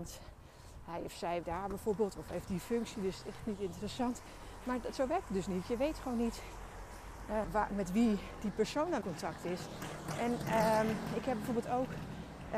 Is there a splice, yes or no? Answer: yes